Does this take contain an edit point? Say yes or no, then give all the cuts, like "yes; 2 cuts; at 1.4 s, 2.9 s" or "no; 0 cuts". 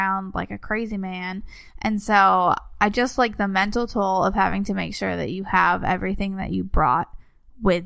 no; 0 cuts